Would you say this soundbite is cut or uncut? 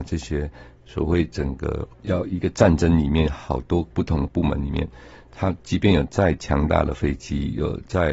cut